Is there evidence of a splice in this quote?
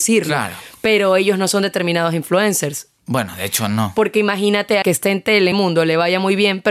yes; 2 cuts; at 4.8 s, 5.5 s

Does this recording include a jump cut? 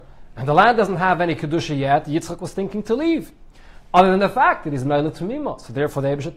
no; 0 cuts

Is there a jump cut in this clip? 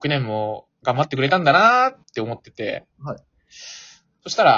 yes; 2 cuts; at 2.0 s, 2.9 s

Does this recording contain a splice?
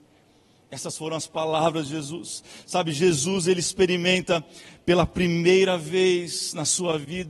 no; 0 cuts

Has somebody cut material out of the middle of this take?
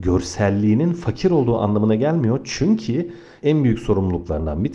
yes; 1 cut; at 3.4 s

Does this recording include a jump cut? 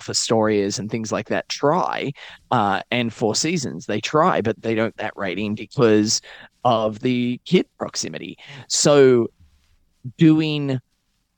yes; 2 cuts; at 4.6 s, 4.9 s

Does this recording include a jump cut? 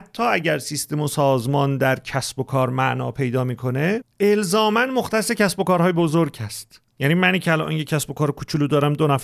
yes; 2 cuts; at 4.1 s, 6.9 s

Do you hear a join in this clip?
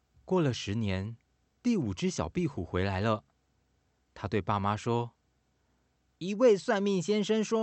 no; 0 cuts

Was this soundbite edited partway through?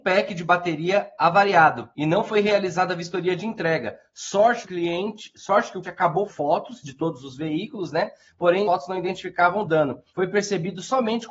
yes; 6 cuts; at 1.9 s, 4.6 s, 5.8 s, 6.3 s, 8.6 s, 10.1 s

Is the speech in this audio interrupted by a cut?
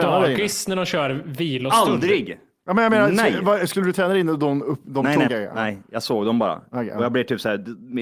yes; 1 cut; at 5.3 s

